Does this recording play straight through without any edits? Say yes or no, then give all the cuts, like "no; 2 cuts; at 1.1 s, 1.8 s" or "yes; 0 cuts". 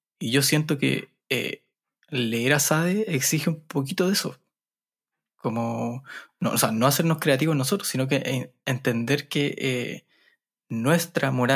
yes; 0 cuts